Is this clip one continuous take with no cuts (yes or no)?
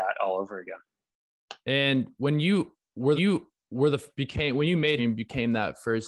no